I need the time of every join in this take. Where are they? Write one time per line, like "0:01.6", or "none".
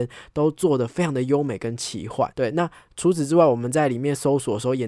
0:02.3